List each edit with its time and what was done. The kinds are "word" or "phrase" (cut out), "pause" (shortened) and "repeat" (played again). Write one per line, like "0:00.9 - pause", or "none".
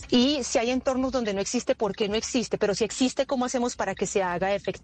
none

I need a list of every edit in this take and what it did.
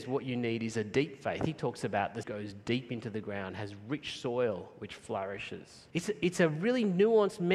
0:02.2 - phrase
0:05.9 - pause

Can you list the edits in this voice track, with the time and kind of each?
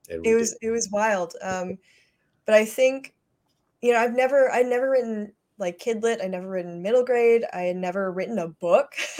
none

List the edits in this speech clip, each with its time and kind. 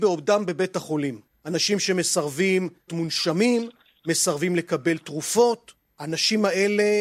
0:02.9 - word

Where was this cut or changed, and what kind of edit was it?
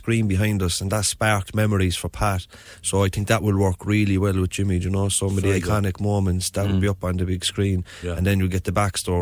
none

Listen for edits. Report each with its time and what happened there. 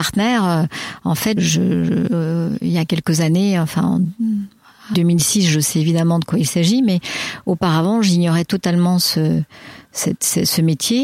0:01.4 - word
0:04.9 - word

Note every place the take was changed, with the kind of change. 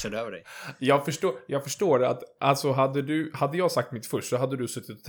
none

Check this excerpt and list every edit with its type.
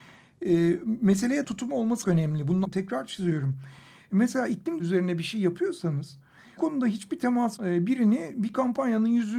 0:01.4 - word
0:02.0 - word
0:02.6 - word
0:04.8 - word
0:06.6 - word
0:07.6 - word

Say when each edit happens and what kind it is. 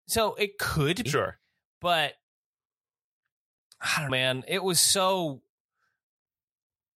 0:01.1 - word
0:04.1 - word

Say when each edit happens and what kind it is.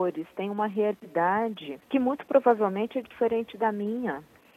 0:01.8 - pause

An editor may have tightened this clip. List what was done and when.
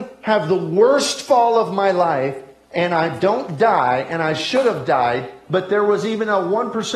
none

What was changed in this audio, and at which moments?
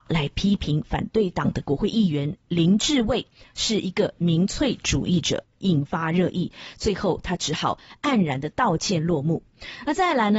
none

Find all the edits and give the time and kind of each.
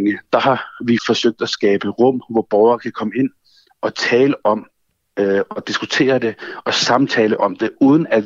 0:01.0 - word

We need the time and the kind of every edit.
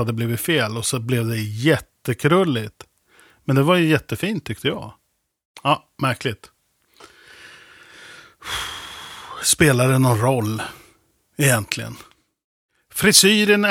none

